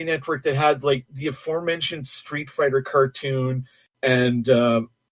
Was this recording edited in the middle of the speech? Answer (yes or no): no